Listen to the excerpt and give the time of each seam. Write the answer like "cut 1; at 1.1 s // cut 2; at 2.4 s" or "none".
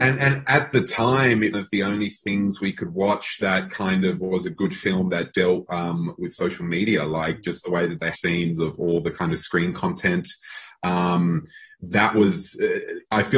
cut 1; at 1.5 s // cut 2; at 8.1 s